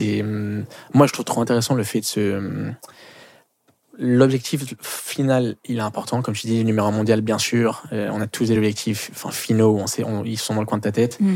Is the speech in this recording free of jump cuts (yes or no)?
yes